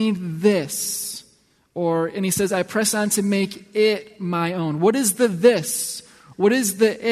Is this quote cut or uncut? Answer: uncut